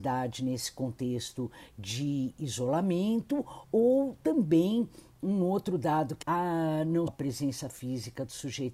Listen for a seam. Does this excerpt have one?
yes; 2 cuts; at 6.2 s, 7.1 s

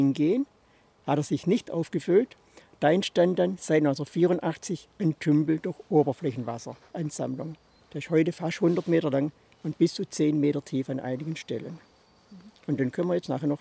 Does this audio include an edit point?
no; 0 cuts

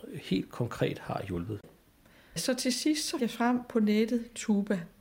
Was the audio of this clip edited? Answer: yes; 1 cut; at 3.2 s

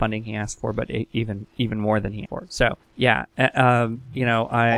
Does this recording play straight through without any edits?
no; 2 cuts; at 2.3 s, 2.8 s

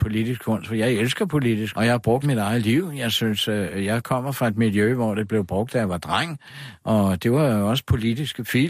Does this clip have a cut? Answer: yes; 2 cuts; at 1.7 s, 2.2 s

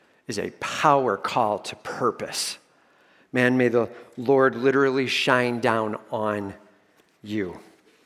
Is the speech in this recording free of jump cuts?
yes; 0 cuts

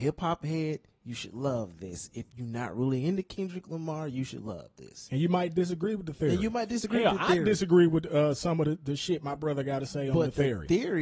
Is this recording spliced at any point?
no; 0 cuts

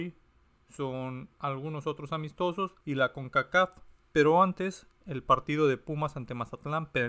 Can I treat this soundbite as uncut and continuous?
no; 3 cuts; at 1.3 s, 2.8 s, 4.0 s

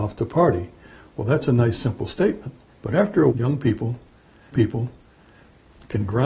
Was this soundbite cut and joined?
yes; 3 cuts; at 2.7 s, 3.3 s, 4.5 s

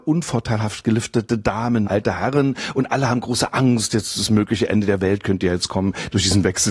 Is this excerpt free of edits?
no; 1 cut; at 1.8 s

